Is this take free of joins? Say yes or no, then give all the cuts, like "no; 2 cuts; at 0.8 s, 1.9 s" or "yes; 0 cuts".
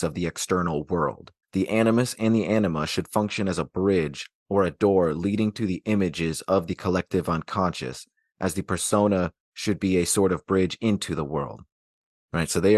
no; 1 cut; at 1.4 s